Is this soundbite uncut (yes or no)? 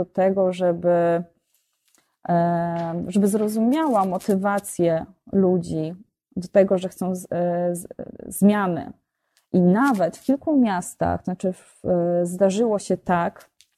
yes